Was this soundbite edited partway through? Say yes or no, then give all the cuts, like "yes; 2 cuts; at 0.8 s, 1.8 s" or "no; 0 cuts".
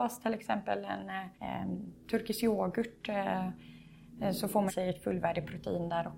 yes; 2 cuts; at 1.3 s, 4.7 s